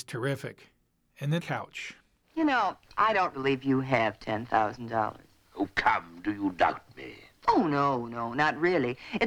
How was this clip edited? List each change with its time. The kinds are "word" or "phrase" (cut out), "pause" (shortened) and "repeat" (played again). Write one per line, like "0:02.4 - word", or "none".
0:01.4 - phrase
0:02.8 - pause
0:03.3 - word